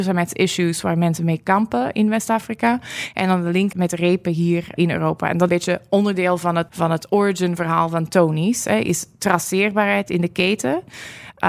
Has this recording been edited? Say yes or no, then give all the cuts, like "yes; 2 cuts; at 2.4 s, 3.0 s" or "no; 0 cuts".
yes; 4 cuts; at 3.7 s, 4.8 s, 5.5 s, 6.7 s